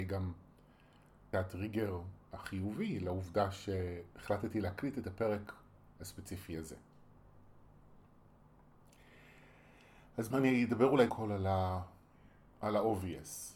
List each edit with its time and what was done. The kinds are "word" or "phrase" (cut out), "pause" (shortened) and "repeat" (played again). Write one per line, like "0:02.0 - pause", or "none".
0:01.3 - word
0:10.3 - word
0:11.1 - word